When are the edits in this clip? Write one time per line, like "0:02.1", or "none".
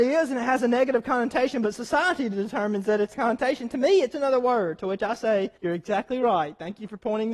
0:03.1
0:04.1
0:05.6